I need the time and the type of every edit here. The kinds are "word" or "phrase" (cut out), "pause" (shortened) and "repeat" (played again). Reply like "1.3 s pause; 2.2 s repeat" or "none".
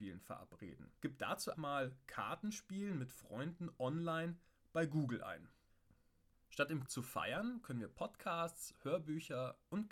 1.0 s pause; 1.5 s word; 6.9 s word

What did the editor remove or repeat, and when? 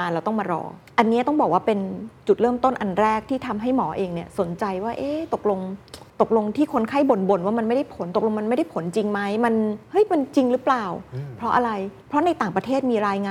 6.1 s pause; 12.0 s pause

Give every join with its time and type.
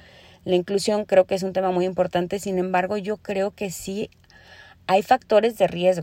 none

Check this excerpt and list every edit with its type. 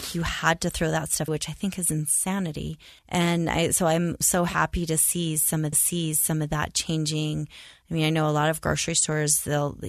1.3 s word; 3.0 s pause; 4.2 s word; 5.7 s repeat

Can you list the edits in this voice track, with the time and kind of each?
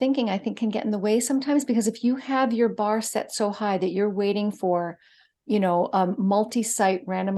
none

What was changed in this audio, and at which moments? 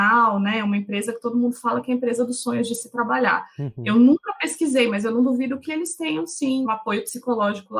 6.6 s word

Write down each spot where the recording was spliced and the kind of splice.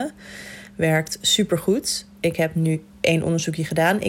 none

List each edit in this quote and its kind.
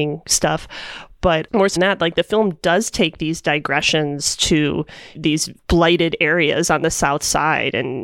1.8 s word; 5.1 s word

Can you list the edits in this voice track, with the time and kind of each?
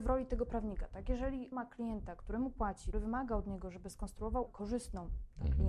1.5 s word; 2.9 s word; 4.5 s word

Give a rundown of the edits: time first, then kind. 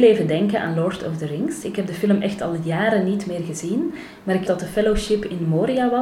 4.5 s word

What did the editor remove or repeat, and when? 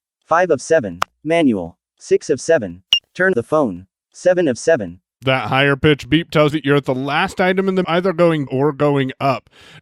3.3 s word; 6.5 s word; 7.8 s word; 8.5 s word

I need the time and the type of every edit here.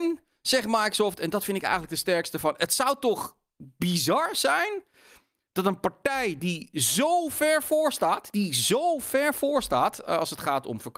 none

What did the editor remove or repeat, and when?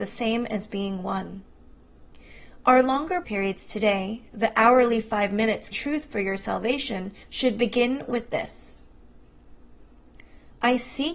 3.2 s word; 5.7 s word; 7.2 s pause

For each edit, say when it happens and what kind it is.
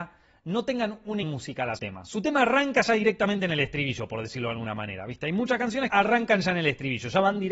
1.2 s word; 1.8 s word; 5.9 s word

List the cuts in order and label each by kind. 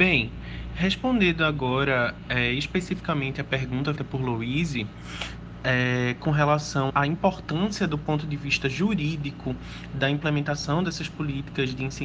4.0 s word; 6.9 s word

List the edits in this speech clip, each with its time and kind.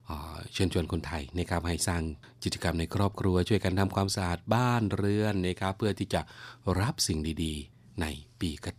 none

